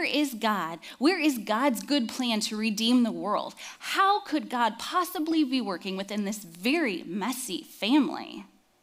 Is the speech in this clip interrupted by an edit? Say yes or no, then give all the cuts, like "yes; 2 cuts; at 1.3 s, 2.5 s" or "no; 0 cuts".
no; 0 cuts